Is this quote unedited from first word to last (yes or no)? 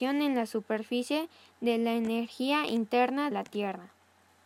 no